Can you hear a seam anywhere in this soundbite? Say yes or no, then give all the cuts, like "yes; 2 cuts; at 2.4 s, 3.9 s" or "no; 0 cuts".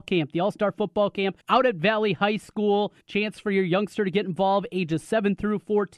yes; 2 cuts; at 1.4 s, 3.0 s